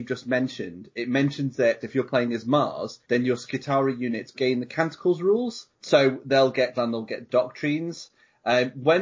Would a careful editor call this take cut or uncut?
cut